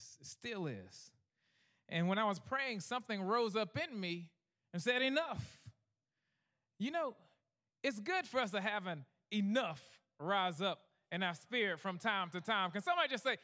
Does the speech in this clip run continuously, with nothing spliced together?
yes; 0 cuts

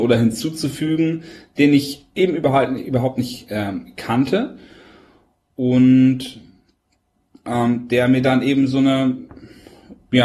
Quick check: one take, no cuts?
yes; 0 cuts

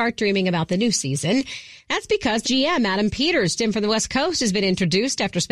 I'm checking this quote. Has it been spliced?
yes; 2 cuts; at 2.4 s, 3.6 s

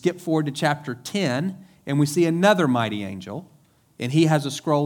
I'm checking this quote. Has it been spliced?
no; 0 cuts

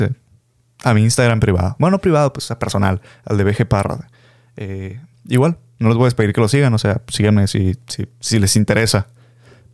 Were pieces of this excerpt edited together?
no; 0 cuts

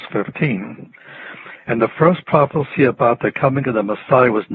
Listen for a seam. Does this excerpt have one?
no; 0 cuts

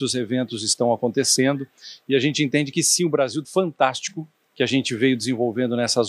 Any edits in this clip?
yes; 1 cut; at 3.4 s

